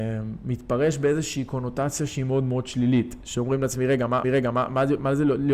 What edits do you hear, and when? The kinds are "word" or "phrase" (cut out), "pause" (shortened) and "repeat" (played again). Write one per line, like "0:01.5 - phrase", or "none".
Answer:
0:04.2 - repeat